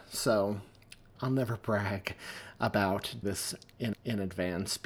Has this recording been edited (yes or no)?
yes